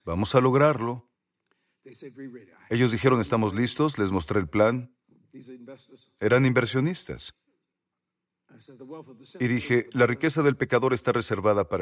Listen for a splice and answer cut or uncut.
uncut